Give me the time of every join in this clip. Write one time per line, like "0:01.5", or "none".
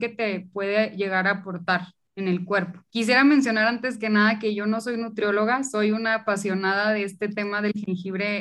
0:02.9